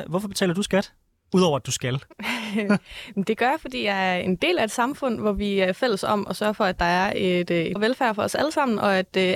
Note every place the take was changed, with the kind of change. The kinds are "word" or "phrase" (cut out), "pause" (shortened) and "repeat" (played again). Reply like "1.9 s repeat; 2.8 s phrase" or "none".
7.8 s word